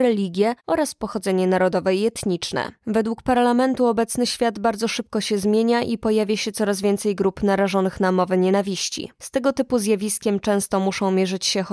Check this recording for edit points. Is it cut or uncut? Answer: uncut